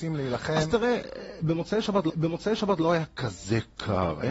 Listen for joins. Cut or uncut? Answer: cut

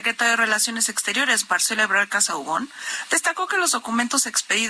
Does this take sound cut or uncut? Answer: uncut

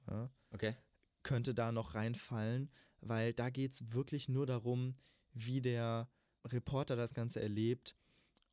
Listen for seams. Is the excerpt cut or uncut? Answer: uncut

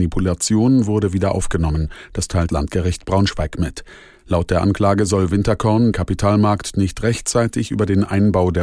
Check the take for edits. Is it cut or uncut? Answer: cut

